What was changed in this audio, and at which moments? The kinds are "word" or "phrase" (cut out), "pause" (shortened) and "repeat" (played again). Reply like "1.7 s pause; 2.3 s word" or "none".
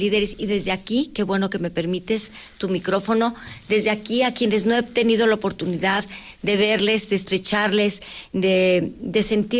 none